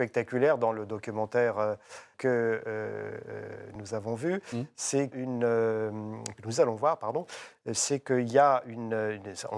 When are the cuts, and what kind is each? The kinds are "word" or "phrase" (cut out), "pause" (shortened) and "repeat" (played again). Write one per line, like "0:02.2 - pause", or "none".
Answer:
0:02.1 - word
0:05.1 - phrase

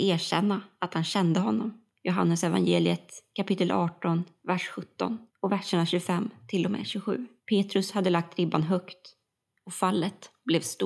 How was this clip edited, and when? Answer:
0:01.9 - pause
0:05.3 - pause
0:07.4 - pause

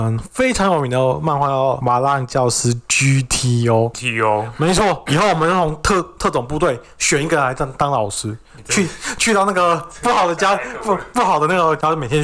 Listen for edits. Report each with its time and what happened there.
none

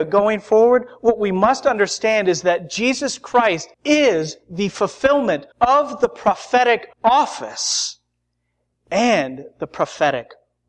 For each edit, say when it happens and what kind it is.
0:03.7 - pause
0:05.5 - pause
0:06.9 - pause

